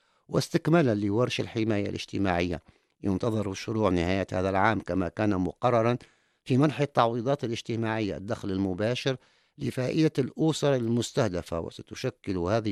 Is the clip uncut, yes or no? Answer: yes